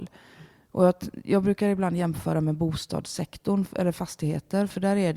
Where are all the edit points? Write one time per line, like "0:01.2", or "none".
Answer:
none